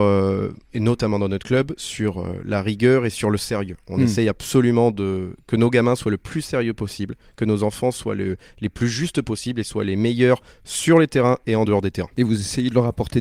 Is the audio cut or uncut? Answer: uncut